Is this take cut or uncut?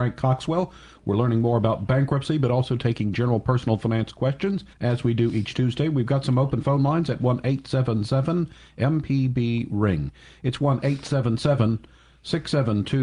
cut